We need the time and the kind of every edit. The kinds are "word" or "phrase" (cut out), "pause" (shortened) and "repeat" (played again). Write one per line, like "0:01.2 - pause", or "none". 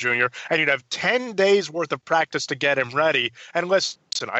none